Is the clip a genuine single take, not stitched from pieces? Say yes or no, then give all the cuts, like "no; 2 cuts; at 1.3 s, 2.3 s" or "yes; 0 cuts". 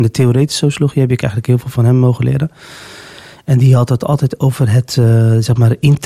yes; 0 cuts